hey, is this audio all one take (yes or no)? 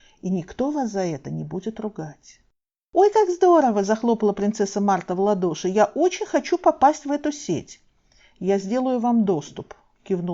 yes